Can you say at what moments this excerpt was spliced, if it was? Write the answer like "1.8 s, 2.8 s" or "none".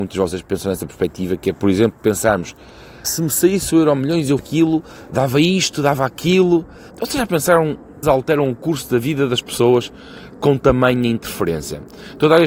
3.0 s, 4.4 s, 6.9 s, 8.0 s